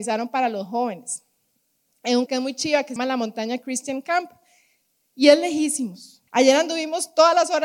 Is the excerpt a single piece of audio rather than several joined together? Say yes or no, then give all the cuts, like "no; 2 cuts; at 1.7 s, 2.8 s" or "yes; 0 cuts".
no; 3 cuts; at 2.3 s, 3.0 s, 6.3 s